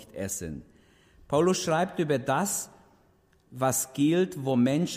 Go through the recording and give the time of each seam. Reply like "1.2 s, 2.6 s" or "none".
none